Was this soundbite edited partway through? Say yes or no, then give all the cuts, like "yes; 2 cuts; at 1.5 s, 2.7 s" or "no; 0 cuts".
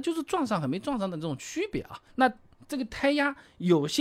yes; 1 cut; at 2.1 s